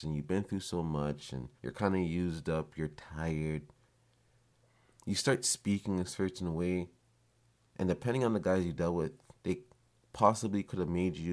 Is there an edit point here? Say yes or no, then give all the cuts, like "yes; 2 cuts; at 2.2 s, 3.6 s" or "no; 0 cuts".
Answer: yes; 2 cuts; at 1.6 s, 9.4 s